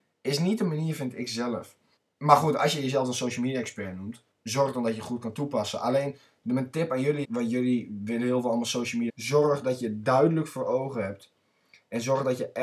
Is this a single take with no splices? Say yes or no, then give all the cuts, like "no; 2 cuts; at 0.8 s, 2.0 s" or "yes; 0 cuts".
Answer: no; 4 cuts; at 2.0 s, 4.3 s, 7.2 s, 9.1 s